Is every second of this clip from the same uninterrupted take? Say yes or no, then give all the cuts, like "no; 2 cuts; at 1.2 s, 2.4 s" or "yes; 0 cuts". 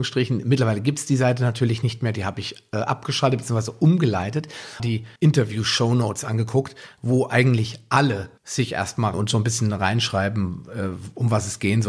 no; 4 cuts; at 4.8 s, 5.2 s, 8.4 s, 9.1 s